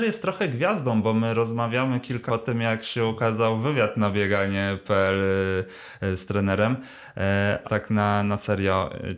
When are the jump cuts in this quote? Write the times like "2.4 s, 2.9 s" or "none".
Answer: 2.3 s, 7.6 s